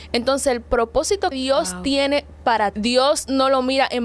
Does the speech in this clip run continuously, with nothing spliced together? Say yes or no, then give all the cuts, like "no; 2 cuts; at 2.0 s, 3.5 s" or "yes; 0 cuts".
no; 2 cuts; at 1.3 s, 2.7 s